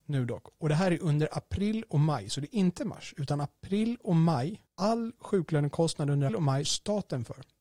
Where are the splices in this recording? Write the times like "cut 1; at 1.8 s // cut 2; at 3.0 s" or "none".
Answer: cut 1; at 4.7 s // cut 2; at 6.3 s // cut 3; at 6.6 s

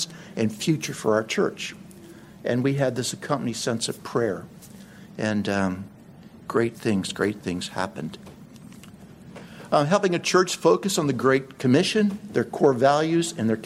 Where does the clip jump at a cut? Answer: none

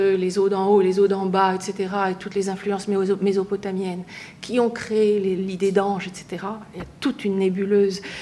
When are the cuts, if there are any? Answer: none

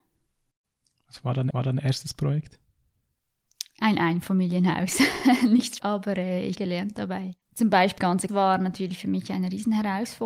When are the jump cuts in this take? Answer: cut 1; at 1.5 s // cut 2; at 5.8 s // cut 3; at 6.6 s // cut 4; at 7.4 s // cut 5; at 8.0 s // cut 6; at 8.3 s

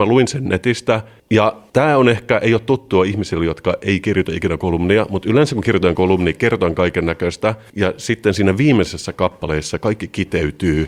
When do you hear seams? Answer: none

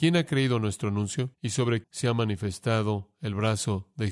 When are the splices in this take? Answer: cut 1; at 1.3 s // cut 2; at 1.8 s

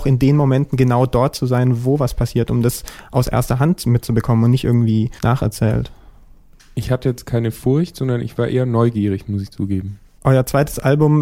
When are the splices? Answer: cut 1; at 5.2 s

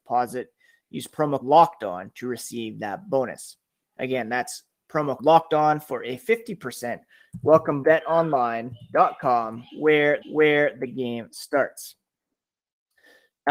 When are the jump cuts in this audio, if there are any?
cut 1; at 1.4 s // cut 2; at 5.2 s // cut 3; at 7.8 s // cut 4; at 10.2 s

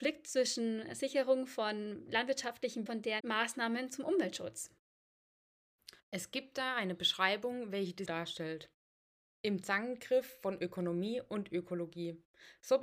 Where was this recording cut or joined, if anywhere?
cut 1; at 2.9 s // cut 2; at 3.2 s // cut 3; at 6.0 s // cut 4; at 8.1 s

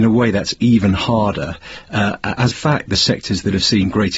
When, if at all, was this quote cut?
cut 1; at 2.5 s

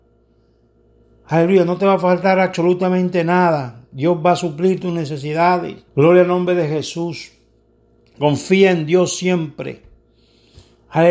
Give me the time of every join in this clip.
cut 1; at 5.9 s

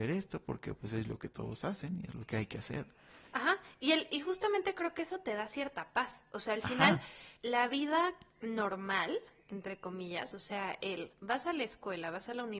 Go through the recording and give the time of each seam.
cut 1; at 7.4 s

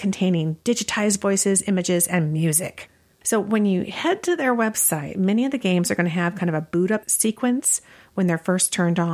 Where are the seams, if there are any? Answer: none

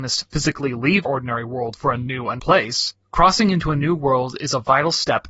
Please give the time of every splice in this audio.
cut 1; at 1.0 s // cut 2; at 2.4 s

